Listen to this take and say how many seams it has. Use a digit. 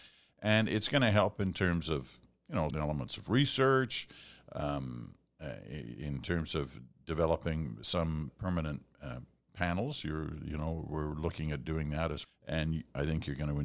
3